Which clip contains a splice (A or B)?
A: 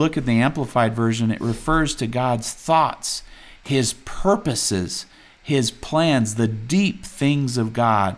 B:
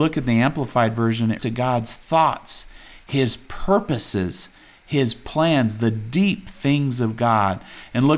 B